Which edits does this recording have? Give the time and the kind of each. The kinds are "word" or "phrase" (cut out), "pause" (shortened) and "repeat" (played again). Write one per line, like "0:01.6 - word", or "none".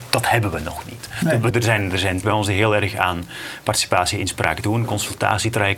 0:01.5 - word
0:02.2 - word